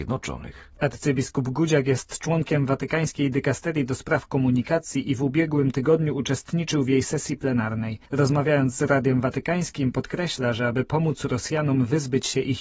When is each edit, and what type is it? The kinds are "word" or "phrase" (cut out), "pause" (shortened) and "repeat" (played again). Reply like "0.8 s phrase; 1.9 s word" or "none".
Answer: 8.1 s pause